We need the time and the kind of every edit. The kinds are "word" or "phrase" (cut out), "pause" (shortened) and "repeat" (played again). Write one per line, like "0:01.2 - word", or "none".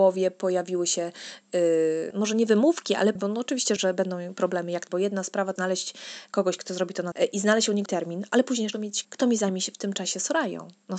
0:02.1 - word
0:03.2 - word
0:03.8 - word
0:04.9 - word
0:05.6 - word
0:07.1 - word
0:07.9 - word
0:08.7 - word
0:09.0 - word

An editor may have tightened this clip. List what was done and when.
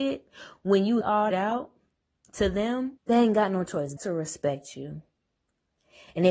0:01.0 - word
0:01.3 - phrase
0:03.0 - pause
0:04.0 - word

